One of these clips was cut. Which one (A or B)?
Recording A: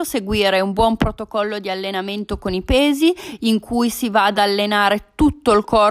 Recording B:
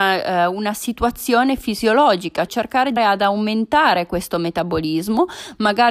B